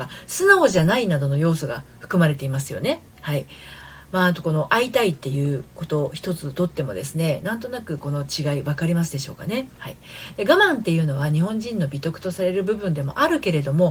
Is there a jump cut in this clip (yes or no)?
yes